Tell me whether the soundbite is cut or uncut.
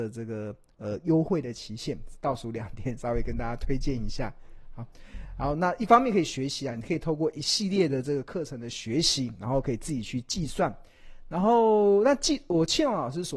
uncut